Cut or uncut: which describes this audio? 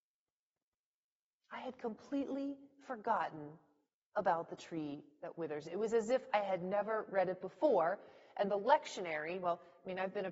uncut